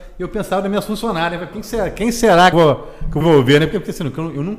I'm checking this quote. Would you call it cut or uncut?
cut